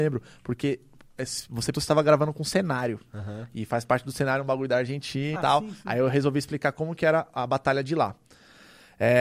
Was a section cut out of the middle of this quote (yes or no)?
yes